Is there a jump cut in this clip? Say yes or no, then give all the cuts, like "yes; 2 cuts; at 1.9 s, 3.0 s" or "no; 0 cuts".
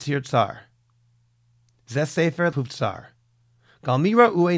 yes; 1 cut; at 2.5 s